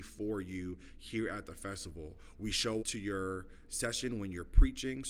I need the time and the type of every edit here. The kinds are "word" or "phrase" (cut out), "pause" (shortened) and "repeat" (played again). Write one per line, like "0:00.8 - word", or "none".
0:02.8 - word